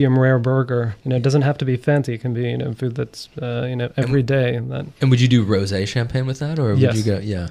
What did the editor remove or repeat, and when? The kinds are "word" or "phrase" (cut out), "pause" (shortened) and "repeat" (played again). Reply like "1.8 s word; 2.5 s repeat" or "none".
1.0 s pause; 5.0 s pause

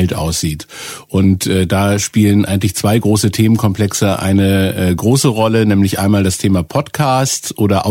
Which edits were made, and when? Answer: none

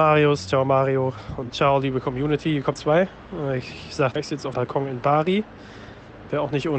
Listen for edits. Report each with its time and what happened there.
1.5 s word; 2.8 s word; 4.2 s word; 4.5 s word

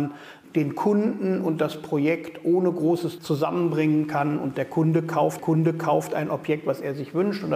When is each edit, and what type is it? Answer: 3.2 s word; 5.4 s repeat

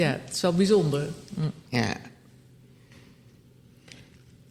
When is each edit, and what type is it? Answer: none

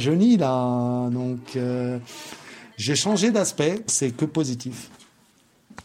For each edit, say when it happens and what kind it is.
2.7 s pause; 3.9 s word

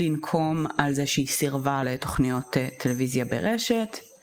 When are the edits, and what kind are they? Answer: 1.8 s phrase

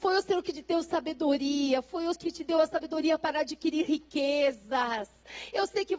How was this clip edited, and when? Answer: 2.2 s word

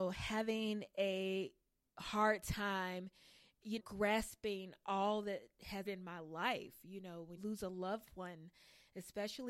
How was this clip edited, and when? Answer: 3.8 s word; 5.9 s word; 7.4 s word

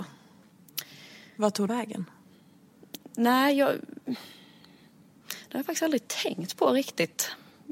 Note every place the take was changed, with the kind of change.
1.7 s word

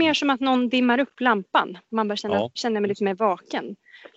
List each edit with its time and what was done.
2.6 s word

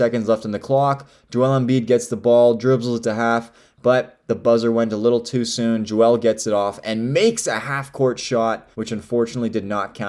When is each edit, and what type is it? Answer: 8.7 s pause

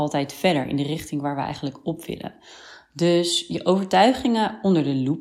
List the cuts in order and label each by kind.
none

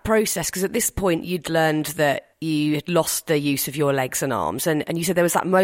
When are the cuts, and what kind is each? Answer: 2.3 s pause

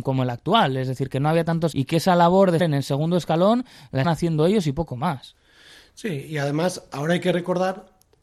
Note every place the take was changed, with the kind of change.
1.7 s word; 2.6 s word; 4.0 s word

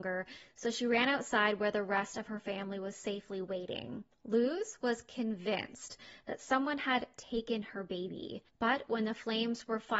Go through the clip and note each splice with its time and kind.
4.1 s pause; 8.5 s pause

